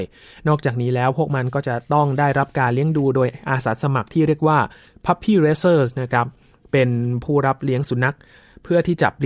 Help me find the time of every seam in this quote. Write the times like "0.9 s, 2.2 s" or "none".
none